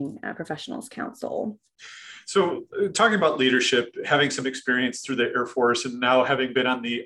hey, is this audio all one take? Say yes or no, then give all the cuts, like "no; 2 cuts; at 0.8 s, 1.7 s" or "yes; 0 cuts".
yes; 0 cuts